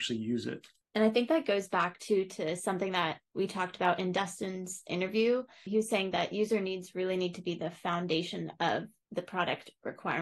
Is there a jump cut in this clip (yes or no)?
yes